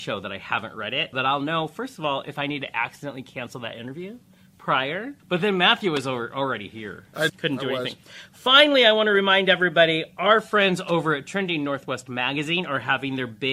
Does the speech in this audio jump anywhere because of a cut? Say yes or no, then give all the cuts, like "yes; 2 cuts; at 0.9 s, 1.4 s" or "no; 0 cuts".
yes; 3 cuts; at 1.1 s, 5.2 s, 7.3 s